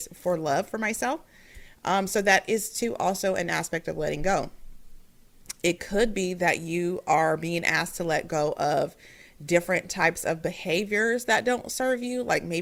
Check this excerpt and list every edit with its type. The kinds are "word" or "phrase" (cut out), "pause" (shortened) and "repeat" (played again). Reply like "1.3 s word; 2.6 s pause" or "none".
none